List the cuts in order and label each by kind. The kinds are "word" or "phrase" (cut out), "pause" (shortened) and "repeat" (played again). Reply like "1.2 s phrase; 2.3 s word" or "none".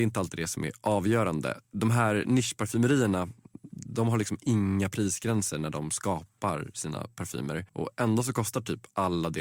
1.6 s pause; 7.7 s pause